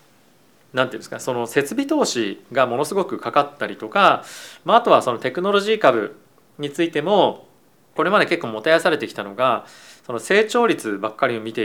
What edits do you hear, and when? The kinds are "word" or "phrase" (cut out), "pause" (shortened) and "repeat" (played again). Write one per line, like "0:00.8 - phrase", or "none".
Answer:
0:08.0 - phrase